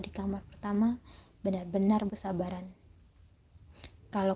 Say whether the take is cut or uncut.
cut